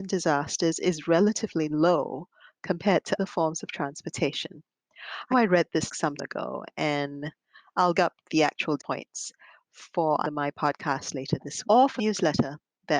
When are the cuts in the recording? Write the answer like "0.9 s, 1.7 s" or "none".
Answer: 3.2 s, 5.3 s, 5.9 s, 6.2 s, 7.9 s, 8.8 s, 10.2 s, 11.6 s, 12.0 s